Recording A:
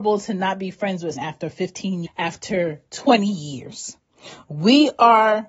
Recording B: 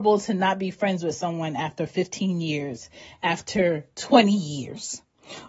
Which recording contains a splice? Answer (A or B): A